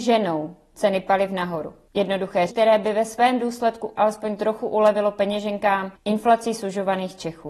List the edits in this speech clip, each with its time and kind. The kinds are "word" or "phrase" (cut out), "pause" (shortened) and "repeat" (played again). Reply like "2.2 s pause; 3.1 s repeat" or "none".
2.5 s word; 4.0 s word

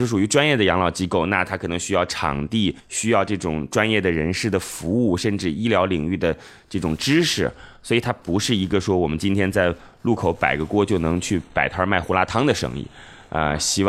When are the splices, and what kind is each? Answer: 2.8 s pause

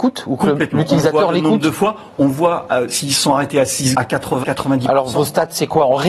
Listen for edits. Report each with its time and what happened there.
3.9 s word; 4.4 s word

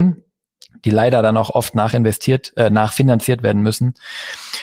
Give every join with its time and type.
none

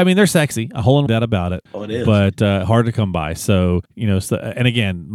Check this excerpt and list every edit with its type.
1.1 s phrase; 1.7 s pause; 3.8 s pause

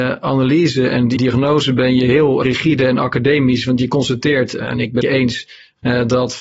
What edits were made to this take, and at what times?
1.2 s word; 2.4 s word; 5.0 s phrase

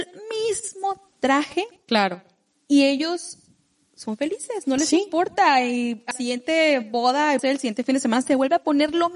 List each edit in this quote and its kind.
6.1 s word; 7.4 s word

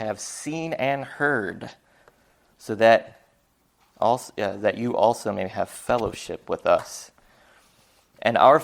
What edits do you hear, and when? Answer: none

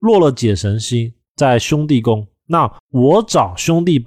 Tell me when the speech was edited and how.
2.8 s pause

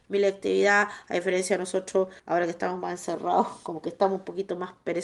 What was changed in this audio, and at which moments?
2.2 s pause

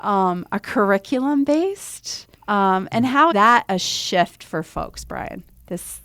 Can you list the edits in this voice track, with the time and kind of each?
2.4 s pause; 3.3 s word

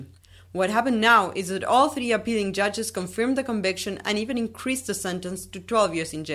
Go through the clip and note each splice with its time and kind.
none

